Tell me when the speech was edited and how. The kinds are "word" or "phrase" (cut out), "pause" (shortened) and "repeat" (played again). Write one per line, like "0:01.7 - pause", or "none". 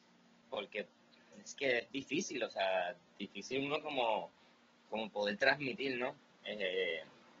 none